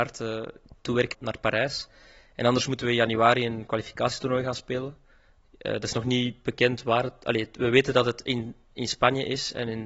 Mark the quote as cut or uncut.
cut